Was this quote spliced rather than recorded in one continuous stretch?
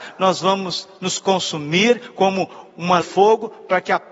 yes; 1 cut; at 3.0 s

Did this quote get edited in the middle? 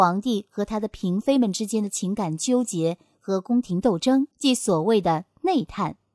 yes; 1 cut; at 4.3 s

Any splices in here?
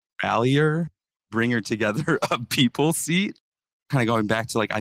no; 0 cuts

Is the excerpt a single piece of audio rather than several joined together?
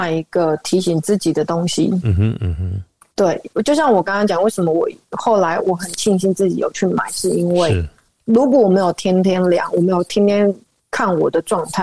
no; 1 cut; at 3.1 s

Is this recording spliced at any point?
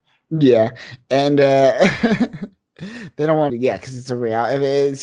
yes; 2 cuts; at 2.7 s, 3.5 s

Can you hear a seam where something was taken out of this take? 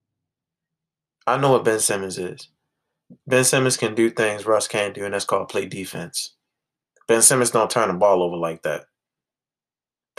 no; 0 cuts

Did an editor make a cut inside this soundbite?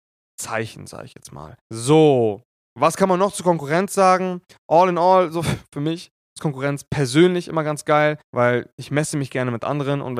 yes; 2 cuts; at 1.6 s, 8.2 s

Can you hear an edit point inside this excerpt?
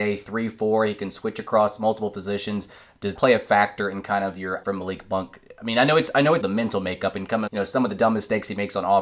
yes; 4 cuts; at 3.2 s, 4.6 s, 6.4 s, 7.5 s

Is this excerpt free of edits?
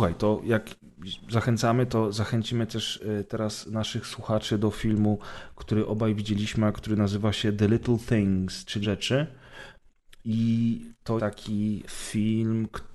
no; 3 cuts; at 8.8 s, 11.2 s, 11.9 s

